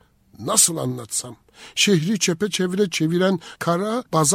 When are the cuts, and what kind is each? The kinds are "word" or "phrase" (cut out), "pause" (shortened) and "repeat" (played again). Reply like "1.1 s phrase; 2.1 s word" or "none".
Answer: none